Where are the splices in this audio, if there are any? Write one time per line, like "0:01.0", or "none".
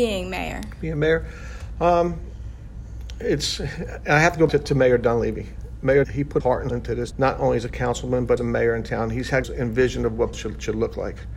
0:04.5
0:06.0
0:06.4
0:06.7
0:07.1
0:08.4
0:09.4
0:10.3